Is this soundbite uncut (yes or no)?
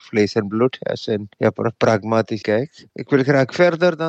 no